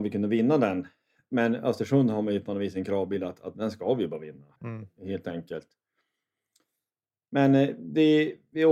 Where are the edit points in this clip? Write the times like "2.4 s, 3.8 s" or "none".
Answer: 3.5 s, 4.5 s